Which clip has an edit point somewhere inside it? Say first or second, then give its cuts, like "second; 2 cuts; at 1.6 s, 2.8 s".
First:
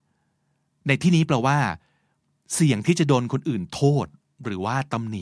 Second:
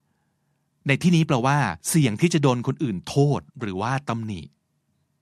second; 2 cuts; at 1.8 s, 3.5 s